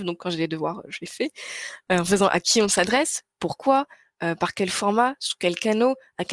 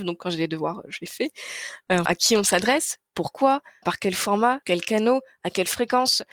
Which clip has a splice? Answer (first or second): second